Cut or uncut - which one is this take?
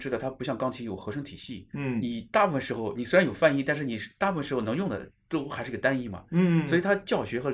uncut